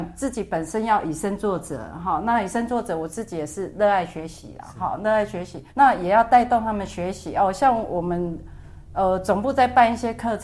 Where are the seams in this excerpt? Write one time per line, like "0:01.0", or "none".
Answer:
0:05.7